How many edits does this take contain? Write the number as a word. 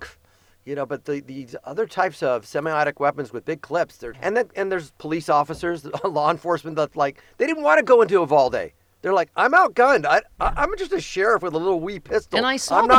one